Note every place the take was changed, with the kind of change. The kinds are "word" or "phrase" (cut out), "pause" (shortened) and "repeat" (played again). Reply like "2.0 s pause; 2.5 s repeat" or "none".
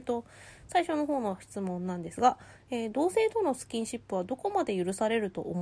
none